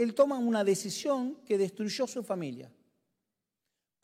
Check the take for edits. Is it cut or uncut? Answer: uncut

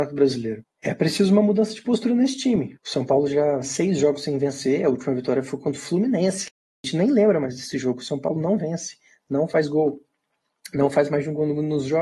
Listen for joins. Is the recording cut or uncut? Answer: cut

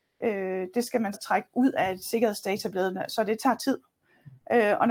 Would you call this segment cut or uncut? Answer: cut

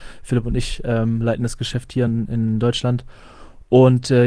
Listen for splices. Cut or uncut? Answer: uncut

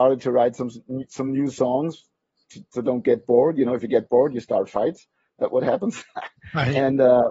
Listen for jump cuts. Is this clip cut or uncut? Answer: uncut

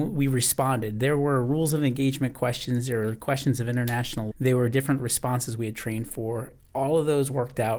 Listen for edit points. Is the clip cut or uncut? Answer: cut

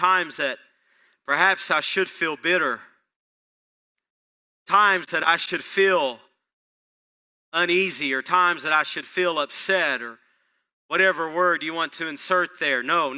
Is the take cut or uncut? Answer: uncut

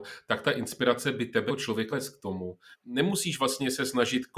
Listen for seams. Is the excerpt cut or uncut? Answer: cut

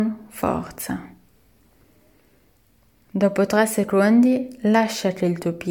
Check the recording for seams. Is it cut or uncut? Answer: uncut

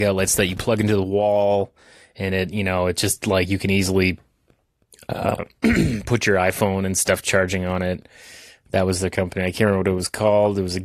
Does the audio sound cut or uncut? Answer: uncut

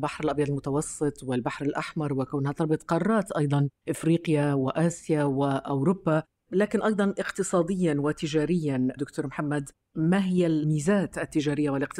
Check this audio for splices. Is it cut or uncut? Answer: uncut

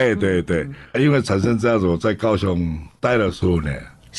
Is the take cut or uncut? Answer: cut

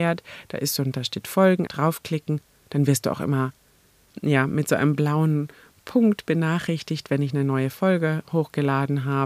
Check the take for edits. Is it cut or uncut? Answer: cut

